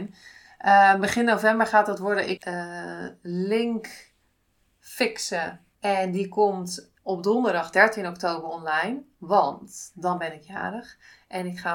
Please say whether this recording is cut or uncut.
cut